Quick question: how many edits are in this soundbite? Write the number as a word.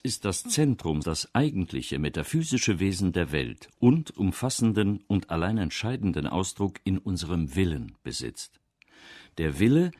two